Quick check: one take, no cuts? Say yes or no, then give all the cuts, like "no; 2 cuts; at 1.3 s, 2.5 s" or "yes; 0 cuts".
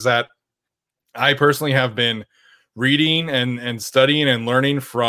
yes; 0 cuts